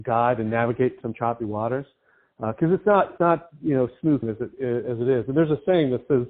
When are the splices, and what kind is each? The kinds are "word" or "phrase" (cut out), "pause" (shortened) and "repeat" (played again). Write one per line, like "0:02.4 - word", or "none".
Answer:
0:01.0 - word
0:03.2 - word
0:04.2 - word